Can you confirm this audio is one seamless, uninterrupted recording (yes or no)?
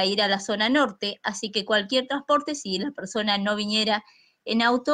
yes